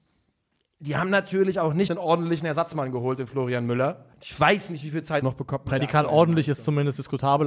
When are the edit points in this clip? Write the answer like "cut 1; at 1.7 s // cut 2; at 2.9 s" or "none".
cut 1; at 1.9 s // cut 2; at 4.1 s // cut 3; at 5.2 s